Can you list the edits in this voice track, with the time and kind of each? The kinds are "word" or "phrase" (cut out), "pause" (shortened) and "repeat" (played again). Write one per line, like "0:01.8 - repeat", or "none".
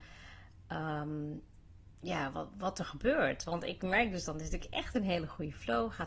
none